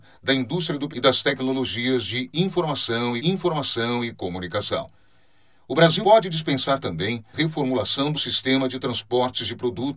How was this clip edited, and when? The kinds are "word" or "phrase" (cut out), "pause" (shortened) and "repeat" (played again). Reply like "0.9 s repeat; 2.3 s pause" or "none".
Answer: 0.9 s word; 3.2 s repeat; 6.0 s word; 7.3 s word; 8.1 s word